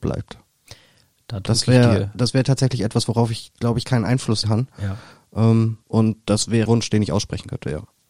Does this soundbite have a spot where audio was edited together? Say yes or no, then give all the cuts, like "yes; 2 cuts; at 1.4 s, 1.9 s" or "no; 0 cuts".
yes; 3 cuts; at 4.4 s, 5.8 s, 6.7 s